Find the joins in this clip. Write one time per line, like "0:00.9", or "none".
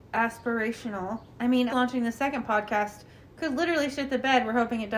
0:01.7